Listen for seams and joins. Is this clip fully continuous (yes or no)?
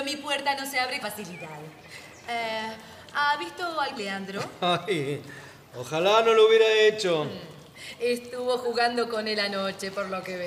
no